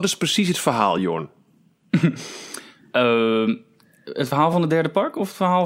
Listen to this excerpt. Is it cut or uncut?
uncut